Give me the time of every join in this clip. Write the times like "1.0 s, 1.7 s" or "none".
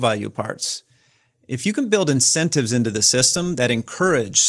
none